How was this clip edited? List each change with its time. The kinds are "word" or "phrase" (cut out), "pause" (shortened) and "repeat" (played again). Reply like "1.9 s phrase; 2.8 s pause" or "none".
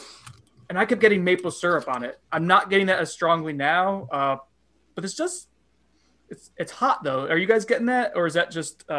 none